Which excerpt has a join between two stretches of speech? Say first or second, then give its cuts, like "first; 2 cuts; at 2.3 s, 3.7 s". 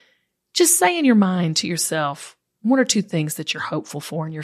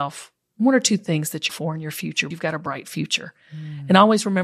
second; 2 cuts; at 1.5 s, 2.3 s